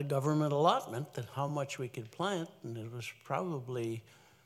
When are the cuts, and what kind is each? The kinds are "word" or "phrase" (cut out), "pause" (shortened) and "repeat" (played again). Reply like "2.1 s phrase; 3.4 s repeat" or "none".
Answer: none